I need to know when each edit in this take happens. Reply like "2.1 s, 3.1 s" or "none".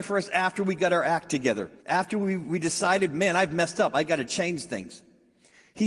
1.8 s